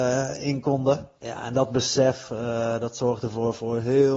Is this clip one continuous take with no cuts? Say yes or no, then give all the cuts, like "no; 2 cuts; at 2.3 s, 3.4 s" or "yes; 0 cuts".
no; 1 cut; at 1.2 s